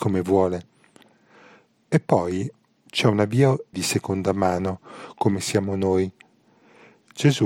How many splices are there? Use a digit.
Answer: 1